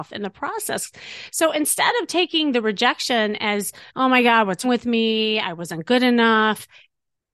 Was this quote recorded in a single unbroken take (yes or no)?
no